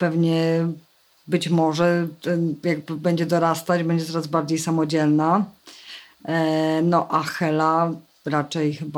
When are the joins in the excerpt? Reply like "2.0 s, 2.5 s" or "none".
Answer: none